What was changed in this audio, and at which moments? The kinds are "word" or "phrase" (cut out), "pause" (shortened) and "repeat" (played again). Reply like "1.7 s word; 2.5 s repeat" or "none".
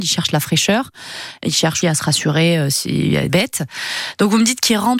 1.8 s word; 3.3 s phrase